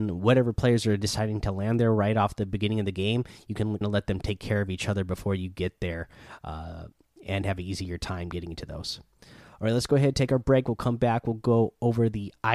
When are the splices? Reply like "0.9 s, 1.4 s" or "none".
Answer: 3.8 s

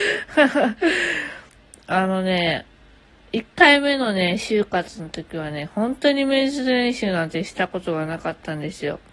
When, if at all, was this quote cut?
none

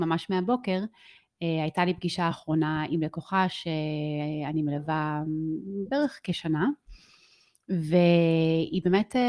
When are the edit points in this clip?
none

